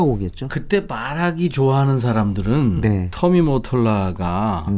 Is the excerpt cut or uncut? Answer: uncut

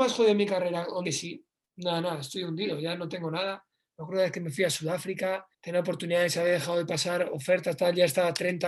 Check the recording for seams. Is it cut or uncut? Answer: cut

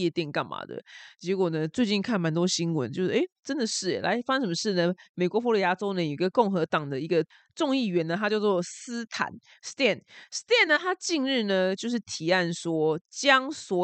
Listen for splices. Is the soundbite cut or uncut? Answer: uncut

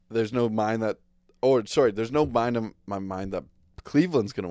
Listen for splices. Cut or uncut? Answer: uncut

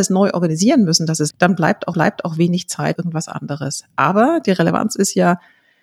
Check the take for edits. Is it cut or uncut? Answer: cut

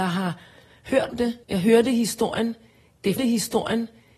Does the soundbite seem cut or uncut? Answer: cut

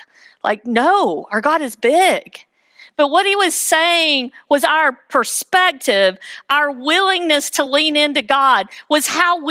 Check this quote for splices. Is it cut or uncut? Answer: uncut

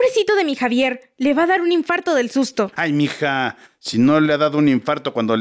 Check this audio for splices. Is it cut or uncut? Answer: uncut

